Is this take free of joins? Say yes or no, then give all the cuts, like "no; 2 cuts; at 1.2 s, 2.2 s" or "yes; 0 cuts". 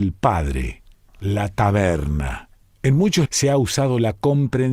no; 2 cuts; at 2.6 s, 3.2 s